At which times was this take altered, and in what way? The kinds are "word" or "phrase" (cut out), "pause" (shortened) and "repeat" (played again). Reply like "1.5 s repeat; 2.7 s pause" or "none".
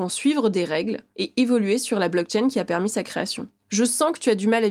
none